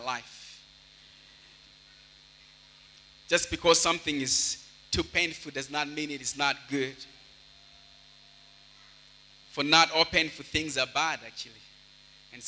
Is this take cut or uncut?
uncut